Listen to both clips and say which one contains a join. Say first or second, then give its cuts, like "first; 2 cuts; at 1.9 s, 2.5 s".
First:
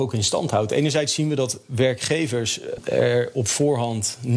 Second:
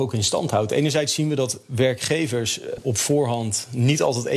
second; 1 cut; at 2.8 s